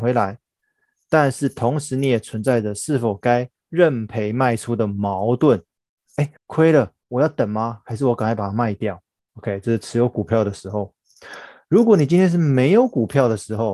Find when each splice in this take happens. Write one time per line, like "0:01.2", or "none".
0:06.4
0:07.0
0:09.2